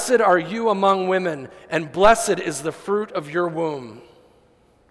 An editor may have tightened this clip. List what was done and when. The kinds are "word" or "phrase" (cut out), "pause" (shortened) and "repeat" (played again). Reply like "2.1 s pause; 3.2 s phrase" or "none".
none